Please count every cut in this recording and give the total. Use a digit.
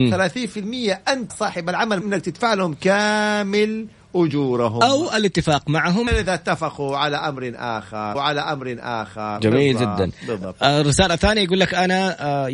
4